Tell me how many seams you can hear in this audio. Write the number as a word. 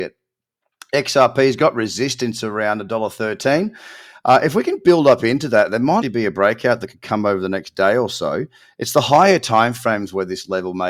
one